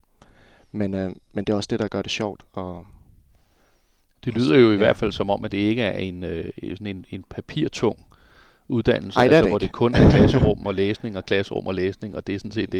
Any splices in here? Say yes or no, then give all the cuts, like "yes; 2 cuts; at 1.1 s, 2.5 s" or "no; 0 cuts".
no; 0 cuts